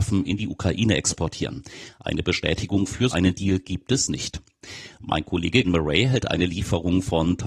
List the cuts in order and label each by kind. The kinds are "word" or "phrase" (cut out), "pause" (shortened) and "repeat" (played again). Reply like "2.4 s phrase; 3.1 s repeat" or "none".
3.1 s word; 5.6 s word